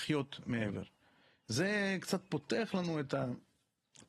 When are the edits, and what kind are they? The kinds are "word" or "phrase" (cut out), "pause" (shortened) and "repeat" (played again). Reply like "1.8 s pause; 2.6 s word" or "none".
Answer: none